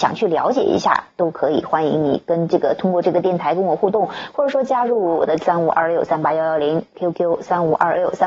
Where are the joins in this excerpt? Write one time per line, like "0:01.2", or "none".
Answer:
0:05.4